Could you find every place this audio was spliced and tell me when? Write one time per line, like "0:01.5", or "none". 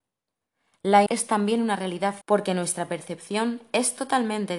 0:01.1
0:02.2